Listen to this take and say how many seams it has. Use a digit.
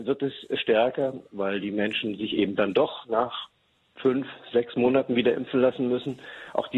0